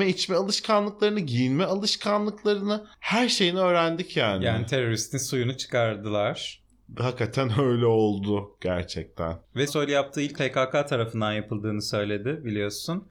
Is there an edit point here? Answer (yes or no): yes